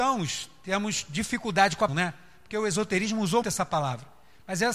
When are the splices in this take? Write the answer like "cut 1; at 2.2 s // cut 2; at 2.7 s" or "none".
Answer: cut 1; at 1.9 s // cut 2; at 3.4 s